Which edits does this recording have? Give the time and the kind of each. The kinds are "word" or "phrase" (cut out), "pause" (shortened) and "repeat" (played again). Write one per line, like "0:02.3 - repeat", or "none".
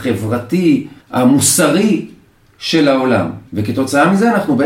0:01.0 - pause
0:03.5 - pause